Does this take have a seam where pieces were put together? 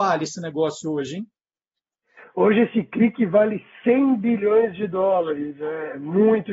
no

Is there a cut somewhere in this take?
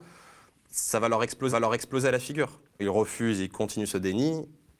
yes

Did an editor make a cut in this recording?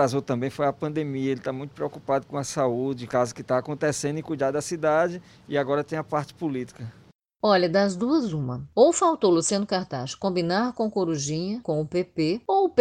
yes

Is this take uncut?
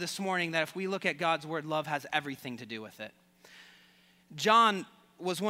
yes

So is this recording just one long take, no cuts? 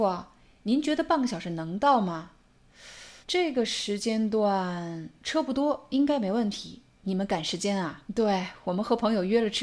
no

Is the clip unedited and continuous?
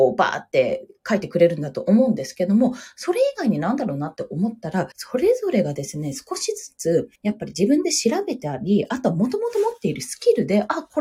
no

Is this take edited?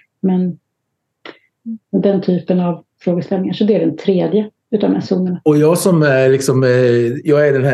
yes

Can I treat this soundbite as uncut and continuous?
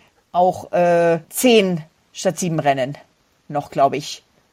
no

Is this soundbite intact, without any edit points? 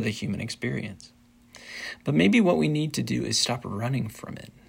yes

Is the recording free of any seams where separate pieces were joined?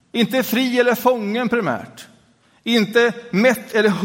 yes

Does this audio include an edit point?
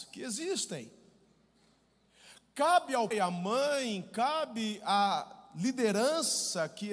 yes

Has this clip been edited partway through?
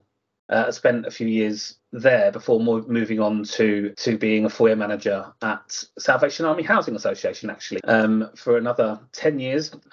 yes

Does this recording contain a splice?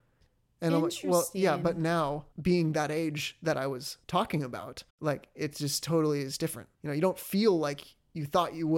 yes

